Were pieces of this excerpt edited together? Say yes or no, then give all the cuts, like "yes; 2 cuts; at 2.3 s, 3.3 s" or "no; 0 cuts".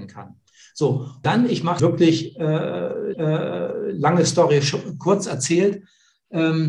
yes; 3 cuts; at 1.2 s, 1.8 s, 3.1 s